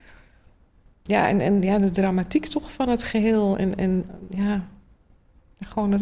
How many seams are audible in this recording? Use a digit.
0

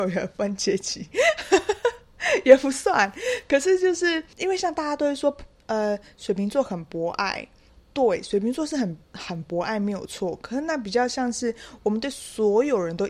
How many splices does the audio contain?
2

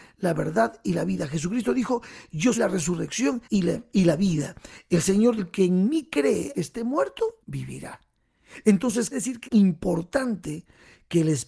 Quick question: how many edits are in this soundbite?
7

